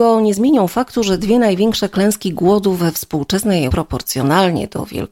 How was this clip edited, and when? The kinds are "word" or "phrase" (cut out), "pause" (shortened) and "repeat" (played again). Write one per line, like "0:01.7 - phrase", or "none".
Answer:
0:03.7 - word